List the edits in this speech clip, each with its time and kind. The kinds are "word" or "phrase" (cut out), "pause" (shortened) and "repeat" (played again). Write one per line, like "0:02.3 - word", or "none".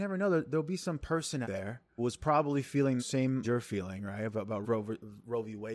0:01.4 - word
0:02.0 - word
0:03.0 - word
0:03.4 - word
0:04.6 - word